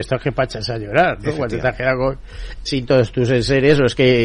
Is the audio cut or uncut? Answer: cut